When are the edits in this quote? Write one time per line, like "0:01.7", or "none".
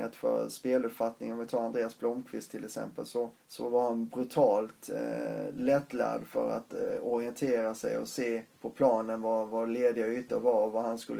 0:03.4
0:08.5